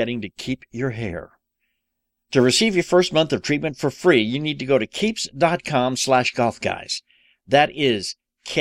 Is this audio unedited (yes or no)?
yes